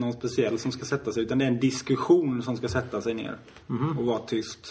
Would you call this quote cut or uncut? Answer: uncut